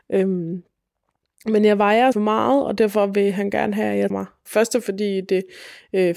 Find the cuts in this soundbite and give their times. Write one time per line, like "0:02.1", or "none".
0:02.1
0:04.1
0:04.5